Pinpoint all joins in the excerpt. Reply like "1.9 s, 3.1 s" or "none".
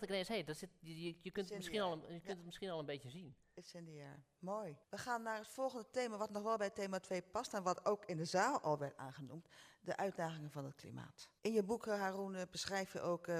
4.8 s, 11.4 s